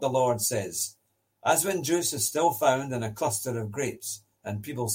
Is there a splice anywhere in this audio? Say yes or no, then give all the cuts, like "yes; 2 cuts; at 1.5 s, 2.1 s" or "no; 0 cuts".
no; 0 cuts